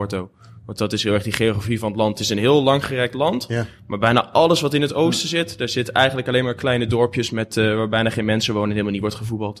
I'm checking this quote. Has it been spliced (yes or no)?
no